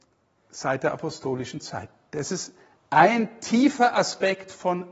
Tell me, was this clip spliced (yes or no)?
no